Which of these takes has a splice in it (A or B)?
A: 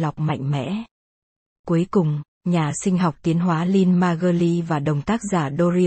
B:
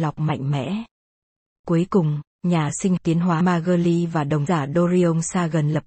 B